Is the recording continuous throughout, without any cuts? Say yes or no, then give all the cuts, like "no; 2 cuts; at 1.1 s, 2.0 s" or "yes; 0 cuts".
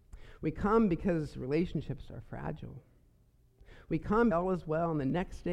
no; 1 cut; at 4.3 s